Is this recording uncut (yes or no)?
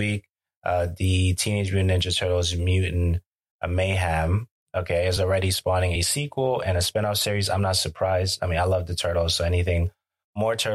yes